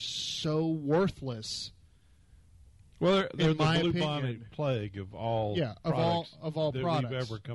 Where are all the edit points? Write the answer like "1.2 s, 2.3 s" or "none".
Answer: none